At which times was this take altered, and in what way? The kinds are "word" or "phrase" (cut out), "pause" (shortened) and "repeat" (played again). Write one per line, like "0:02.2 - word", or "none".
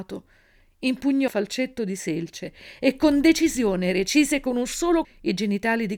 0:01.3 - word
0:05.0 - word

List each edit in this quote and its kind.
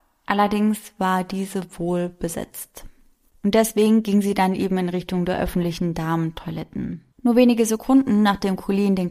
0:07.1 - pause

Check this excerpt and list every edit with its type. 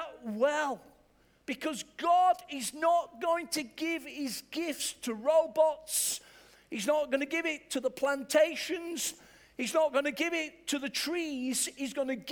none

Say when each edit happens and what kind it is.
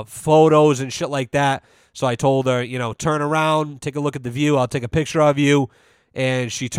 none

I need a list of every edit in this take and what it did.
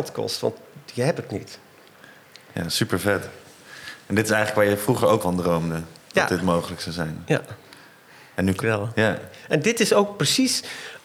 0:05.2 - word
0:08.6 - word

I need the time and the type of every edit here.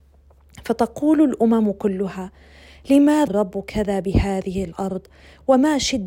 0:03.3 - word

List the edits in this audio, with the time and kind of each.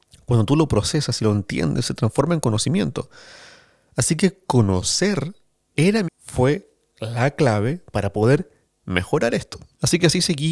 0:05.7 - word
0:06.1 - word

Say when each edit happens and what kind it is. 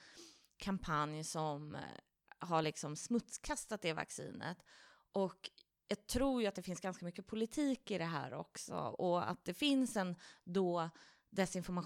none

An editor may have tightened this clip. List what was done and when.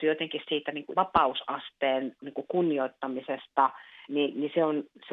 0:00.9 - word
0:04.1 - word

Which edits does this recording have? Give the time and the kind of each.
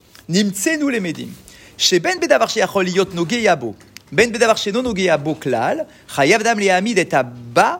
none

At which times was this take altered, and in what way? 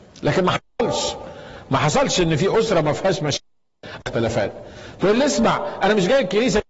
0:04.0 - phrase

